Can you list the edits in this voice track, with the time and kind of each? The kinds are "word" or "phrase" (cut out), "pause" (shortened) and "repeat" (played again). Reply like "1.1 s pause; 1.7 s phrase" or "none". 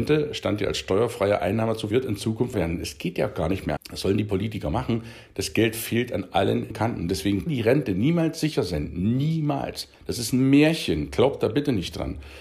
1.9 s phrase; 2.5 s word; 3.8 s word; 6.7 s word; 7.5 s word; 9.9 s pause